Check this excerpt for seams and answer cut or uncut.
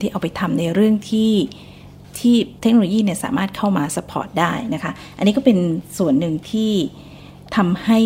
cut